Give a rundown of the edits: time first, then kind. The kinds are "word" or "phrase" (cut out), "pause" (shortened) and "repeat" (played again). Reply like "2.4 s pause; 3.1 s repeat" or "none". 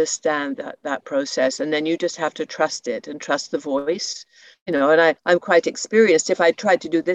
5.2 s pause